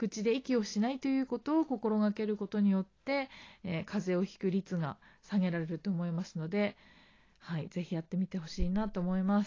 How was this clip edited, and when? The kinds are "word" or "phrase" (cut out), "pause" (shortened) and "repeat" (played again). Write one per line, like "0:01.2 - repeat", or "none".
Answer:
none